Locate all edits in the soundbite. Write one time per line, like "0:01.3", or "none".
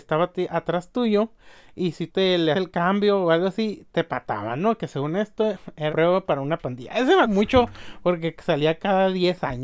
0:02.1
0:02.5
0:05.9
0:07.2